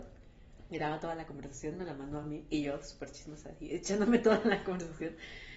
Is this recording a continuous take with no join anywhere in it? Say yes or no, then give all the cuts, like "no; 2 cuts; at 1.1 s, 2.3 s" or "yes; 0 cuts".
yes; 0 cuts